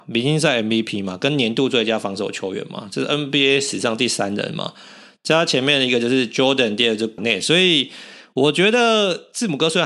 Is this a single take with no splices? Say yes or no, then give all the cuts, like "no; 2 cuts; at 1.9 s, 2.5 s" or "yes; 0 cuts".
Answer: no; 1 cut; at 7.2 s